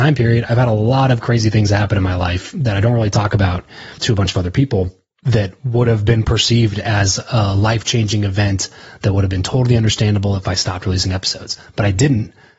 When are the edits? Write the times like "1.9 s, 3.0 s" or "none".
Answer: none